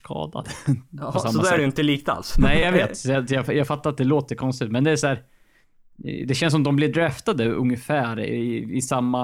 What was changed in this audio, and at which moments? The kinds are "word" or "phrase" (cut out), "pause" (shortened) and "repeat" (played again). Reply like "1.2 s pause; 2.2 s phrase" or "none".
2.6 s word